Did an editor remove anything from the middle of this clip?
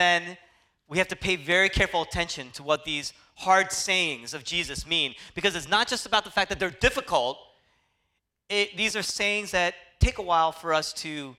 no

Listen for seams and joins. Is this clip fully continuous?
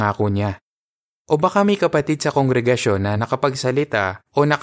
yes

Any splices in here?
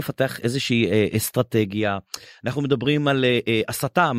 no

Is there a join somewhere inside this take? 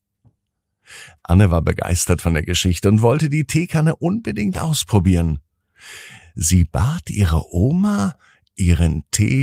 no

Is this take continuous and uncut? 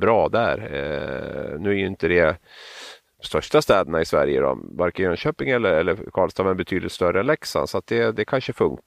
yes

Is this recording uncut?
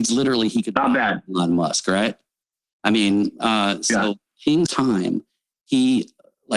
no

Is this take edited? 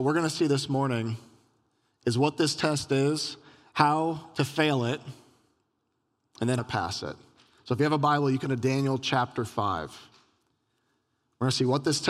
yes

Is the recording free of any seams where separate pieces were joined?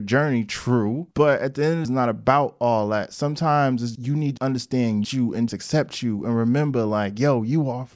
no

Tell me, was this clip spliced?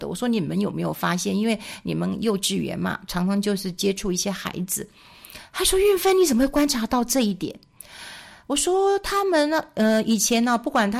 no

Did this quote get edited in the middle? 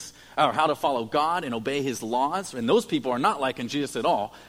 no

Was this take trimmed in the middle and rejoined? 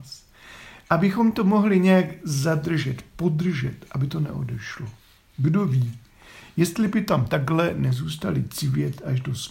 no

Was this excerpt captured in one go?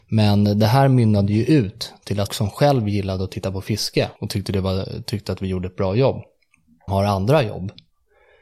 no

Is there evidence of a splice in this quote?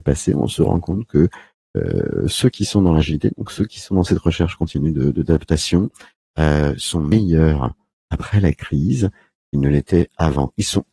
no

